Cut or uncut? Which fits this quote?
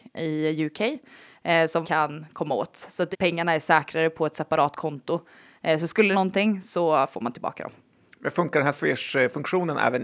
cut